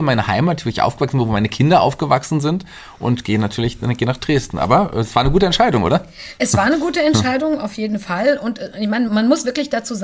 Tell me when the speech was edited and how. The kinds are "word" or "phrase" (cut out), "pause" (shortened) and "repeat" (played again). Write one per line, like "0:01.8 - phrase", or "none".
0:09.1 - word

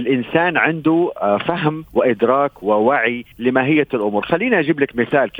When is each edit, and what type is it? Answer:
0:01.9 - pause
0:03.3 - pause

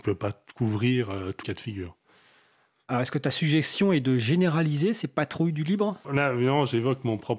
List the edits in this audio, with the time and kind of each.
0:01.4 - word
0:06.0 - word

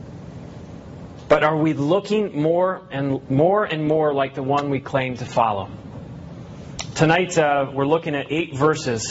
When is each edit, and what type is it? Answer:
none

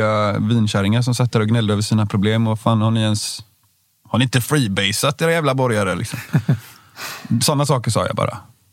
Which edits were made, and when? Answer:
none

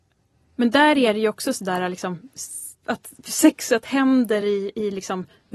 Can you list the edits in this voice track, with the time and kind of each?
none

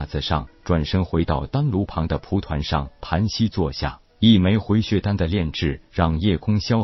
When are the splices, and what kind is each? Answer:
0:04.1 - pause

